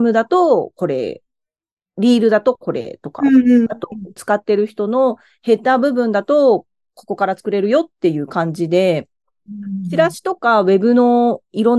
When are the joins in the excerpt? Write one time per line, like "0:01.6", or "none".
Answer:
0:04.2